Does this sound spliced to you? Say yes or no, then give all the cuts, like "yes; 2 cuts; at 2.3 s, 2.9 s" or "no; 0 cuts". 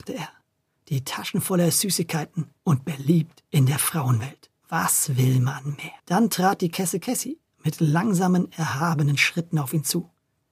yes; 4 cuts; at 2.6 s, 3.5 s, 4.6 s, 6.0 s